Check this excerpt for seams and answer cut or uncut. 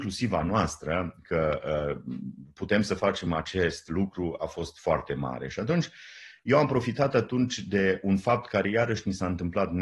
uncut